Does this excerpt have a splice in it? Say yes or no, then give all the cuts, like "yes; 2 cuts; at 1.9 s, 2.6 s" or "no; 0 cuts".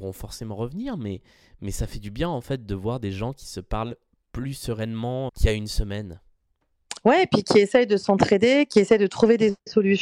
yes; 1 cut; at 5.3 s